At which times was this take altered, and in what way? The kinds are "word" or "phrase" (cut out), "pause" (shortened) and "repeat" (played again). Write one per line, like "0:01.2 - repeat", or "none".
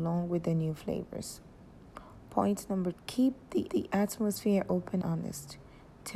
0:02.9 - word
0:03.7 - repeat
0:05.0 - word